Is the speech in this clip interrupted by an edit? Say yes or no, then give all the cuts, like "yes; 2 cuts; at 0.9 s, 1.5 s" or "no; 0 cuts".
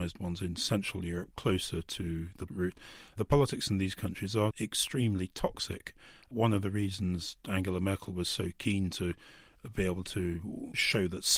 yes; 1 cut; at 2.5 s